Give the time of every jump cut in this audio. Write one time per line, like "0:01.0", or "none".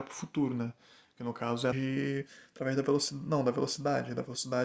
0:01.7